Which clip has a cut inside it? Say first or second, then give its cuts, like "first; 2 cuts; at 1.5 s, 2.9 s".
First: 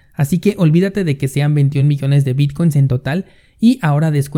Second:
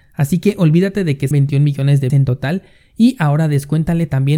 second; 2 cuts; at 1.3 s, 2.1 s